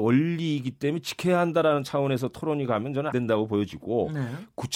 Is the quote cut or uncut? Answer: cut